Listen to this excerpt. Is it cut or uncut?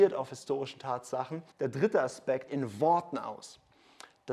cut